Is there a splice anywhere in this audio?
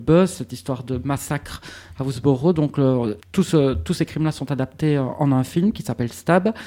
yes; 1 cut; at 3.2 s

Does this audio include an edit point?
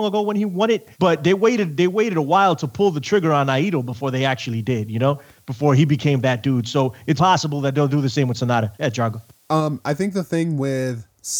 yes; 3 cuts; at 0.9 s, 7.2 s, 8.7 s

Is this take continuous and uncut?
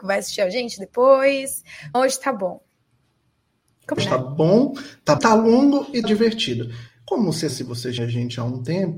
no; 6 cuts; at 1.9 s, 4.0 s, 5.2 s, 6.0 s, 7.5 s, 8.0 s

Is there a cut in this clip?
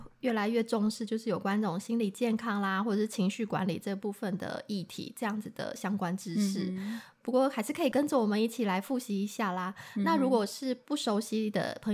no; 0 cuts

